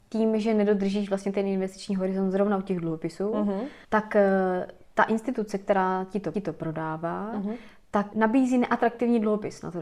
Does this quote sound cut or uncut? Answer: cut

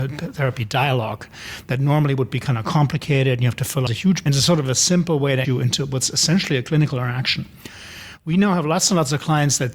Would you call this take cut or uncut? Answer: cut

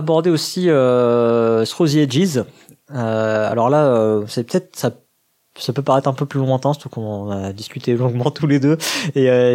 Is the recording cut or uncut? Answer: uncut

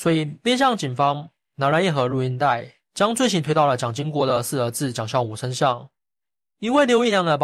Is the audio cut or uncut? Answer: uncut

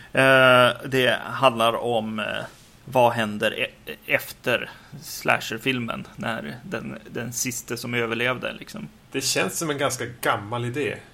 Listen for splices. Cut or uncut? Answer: uncut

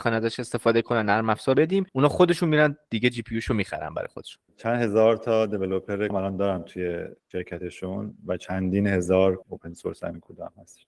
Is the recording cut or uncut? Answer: cut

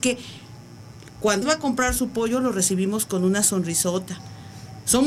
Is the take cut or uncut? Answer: cut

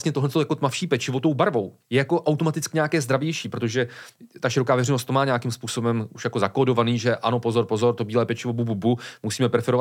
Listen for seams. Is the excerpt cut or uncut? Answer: cut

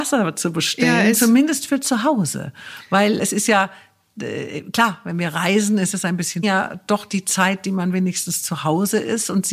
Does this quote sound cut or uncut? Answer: cut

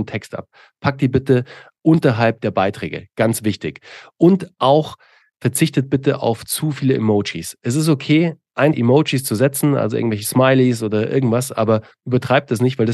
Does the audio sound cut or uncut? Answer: cut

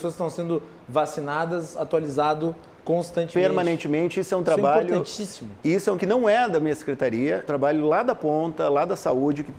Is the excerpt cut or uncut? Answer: cut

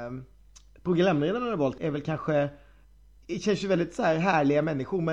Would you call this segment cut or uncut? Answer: cut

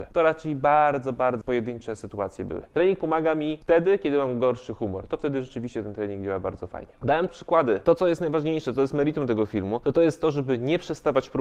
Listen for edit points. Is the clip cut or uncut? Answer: cut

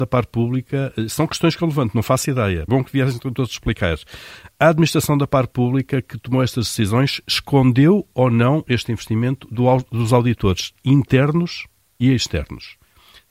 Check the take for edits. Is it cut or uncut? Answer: cut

